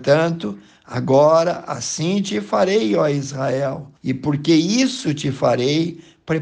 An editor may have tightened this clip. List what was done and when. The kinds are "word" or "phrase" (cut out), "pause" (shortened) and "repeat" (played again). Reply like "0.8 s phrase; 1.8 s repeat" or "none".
4.0 s pause

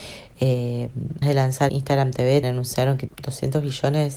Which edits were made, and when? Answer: 1.2 s word; 1.7 s word; 2.4 s word; 3.1 s word

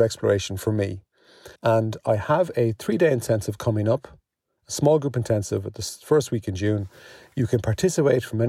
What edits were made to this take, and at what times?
1.6 s pause

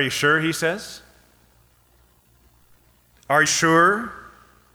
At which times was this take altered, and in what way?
3.5 s word

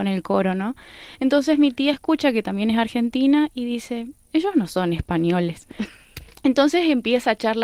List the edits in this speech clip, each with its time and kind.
none

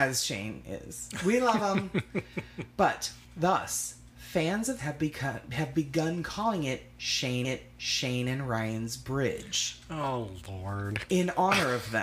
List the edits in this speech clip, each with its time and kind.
3.2 s pause; 4.8 s phrase; 7.4 s repeat

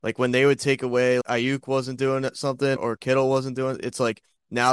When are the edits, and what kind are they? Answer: 1.2 s word; 2.8 s word

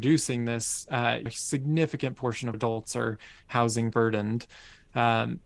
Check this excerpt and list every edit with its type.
1.3 s word; 2.5 s word; 3.9 s word

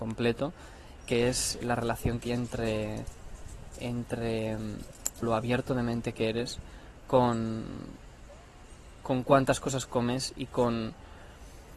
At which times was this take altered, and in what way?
1.0 s word; 1.6 s word; 2.3 s word; 5.2 s phrase

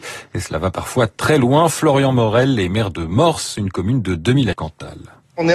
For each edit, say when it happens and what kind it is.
4.5 s phrase

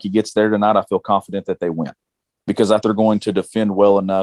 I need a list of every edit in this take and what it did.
2.8 s word

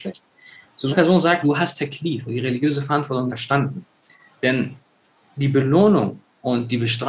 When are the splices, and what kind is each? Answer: 0.9 s word; 1.4 s word; 2.3 s word; 3.3 s word

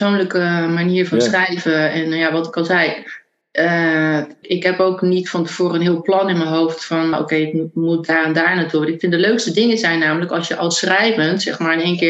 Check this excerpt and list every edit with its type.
4.4 s word; 7.1 s word

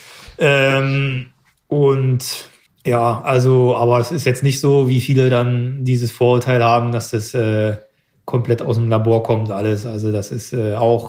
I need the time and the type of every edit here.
2.7 s pause

